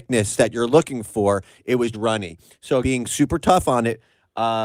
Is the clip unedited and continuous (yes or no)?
no